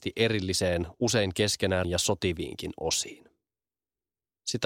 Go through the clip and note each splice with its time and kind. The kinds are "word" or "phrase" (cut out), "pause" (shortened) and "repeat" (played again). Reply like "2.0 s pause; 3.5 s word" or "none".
1.8 s word